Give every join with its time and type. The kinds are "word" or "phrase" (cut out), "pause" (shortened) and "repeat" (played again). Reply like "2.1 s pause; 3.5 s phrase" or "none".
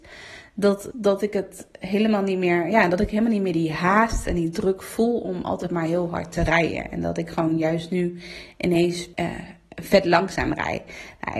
0.9 s word; 9.1 s pause